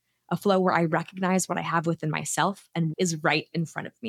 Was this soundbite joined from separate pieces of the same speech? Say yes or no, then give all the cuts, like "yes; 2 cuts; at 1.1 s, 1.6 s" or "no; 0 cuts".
yes; 1 cut; at 2.9 s